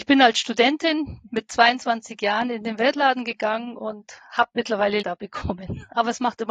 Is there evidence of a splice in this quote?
yes; 1 cut; at 5.0 s

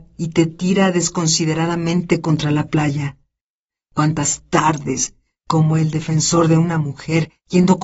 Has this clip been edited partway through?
no; 0 cuts

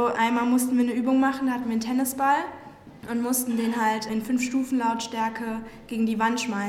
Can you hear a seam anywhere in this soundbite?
no; 0 cuts

